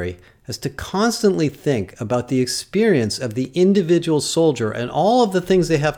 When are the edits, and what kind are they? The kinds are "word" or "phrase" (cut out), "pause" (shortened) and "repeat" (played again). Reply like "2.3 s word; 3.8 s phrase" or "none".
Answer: none